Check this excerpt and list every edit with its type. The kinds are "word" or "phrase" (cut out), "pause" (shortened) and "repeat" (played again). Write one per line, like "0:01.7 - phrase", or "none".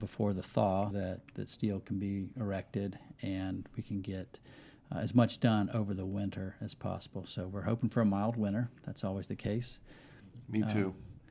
0:00.9 - word